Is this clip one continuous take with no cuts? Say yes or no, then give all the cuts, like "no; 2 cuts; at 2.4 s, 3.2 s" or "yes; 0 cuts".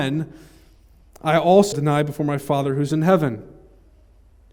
no; 1 cut; at 1.7 s